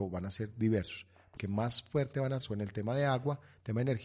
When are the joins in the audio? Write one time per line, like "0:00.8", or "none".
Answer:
0:01.4
0:02.4